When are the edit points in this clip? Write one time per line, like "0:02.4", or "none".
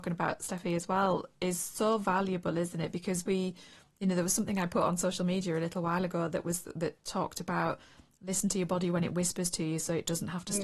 none